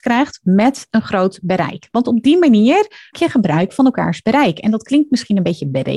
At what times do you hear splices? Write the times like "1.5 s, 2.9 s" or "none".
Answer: 3.1 s